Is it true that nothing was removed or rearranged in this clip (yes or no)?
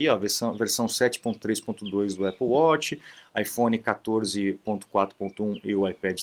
yes